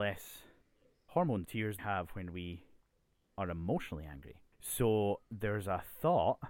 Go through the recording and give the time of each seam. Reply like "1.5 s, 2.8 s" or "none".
1.4 s, 1.8 s, 4.5 s